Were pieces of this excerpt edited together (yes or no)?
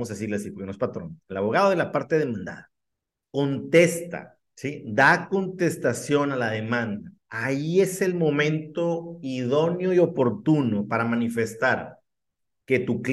yes